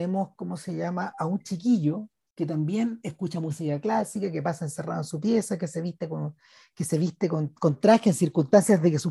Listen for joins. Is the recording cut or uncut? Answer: uncut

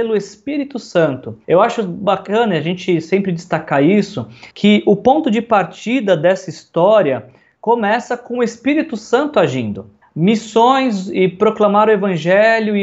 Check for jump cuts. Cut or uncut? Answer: cut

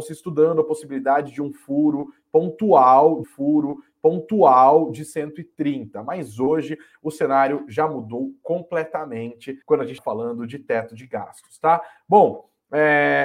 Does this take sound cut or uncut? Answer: cut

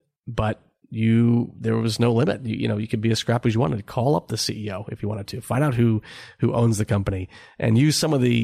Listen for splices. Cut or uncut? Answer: uncut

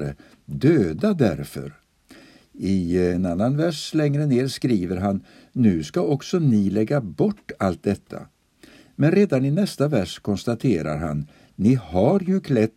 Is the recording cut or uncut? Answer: uncut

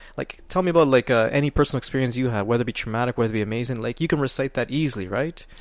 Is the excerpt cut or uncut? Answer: uncut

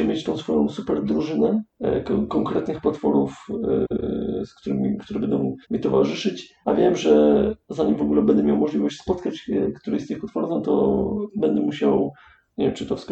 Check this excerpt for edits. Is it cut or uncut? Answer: cut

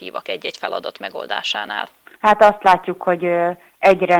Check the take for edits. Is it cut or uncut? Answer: uncut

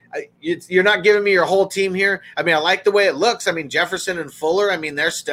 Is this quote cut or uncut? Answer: uncut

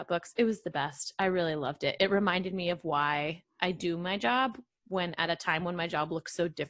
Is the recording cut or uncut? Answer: uncut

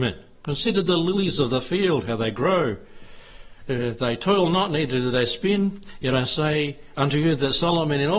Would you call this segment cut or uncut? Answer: uncut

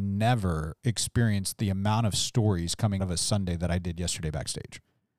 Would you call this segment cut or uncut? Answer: cut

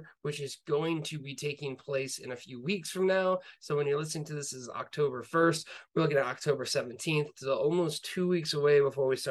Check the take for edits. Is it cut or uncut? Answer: uncut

